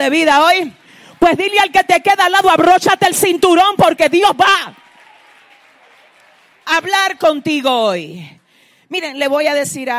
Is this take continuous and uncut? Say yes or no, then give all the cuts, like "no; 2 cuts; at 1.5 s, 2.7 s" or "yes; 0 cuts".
yes; 0 cuts